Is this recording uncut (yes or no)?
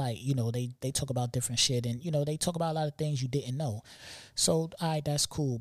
yes